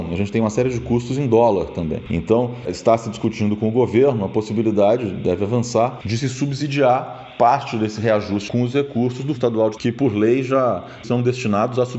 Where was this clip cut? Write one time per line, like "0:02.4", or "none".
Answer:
0:08.5
0:09.4
0:09.8
0:11.0